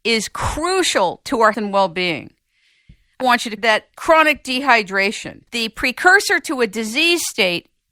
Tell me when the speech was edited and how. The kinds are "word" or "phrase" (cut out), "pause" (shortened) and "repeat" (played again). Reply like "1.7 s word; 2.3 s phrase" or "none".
1.5 s word; 3.2 s word; 3.6 s word; 5.5 s word